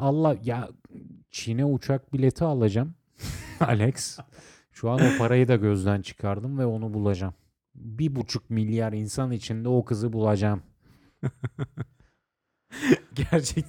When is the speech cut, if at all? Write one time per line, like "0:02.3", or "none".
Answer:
none